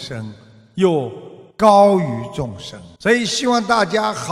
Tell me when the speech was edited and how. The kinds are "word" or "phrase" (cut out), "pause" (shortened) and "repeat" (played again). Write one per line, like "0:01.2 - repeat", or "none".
0:01.5 - pause
0:03.0 - pause